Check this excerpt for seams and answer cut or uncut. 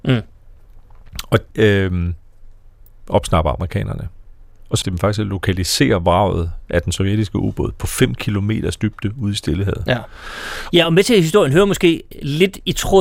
cut